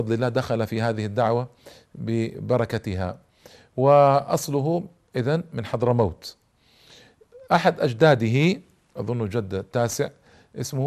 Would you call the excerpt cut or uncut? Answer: uncut